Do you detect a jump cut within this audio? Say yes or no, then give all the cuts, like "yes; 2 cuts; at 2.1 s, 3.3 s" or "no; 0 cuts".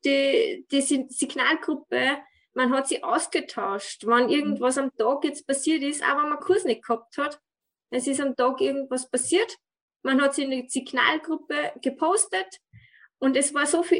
yes; 1 cut; at 6.4 s